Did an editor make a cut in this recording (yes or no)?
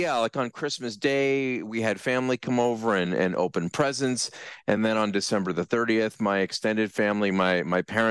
no